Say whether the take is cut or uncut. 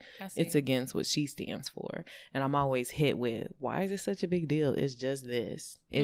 uncut